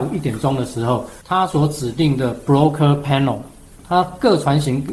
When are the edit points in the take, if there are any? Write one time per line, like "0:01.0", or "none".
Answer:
none